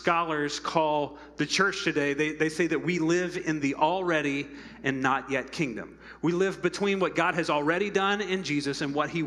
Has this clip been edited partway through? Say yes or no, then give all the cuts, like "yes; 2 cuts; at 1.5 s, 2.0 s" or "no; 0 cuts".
no; 0 cuts